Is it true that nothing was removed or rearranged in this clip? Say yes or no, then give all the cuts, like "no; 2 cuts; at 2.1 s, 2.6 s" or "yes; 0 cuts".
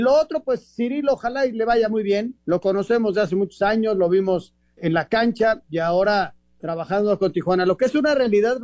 no; 2 cuts; at 2.4 s, 4.8 s